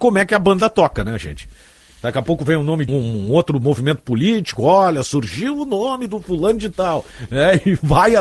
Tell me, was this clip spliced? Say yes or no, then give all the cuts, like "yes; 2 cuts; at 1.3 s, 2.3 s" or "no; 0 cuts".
yes; 1 cut; at 2.9 s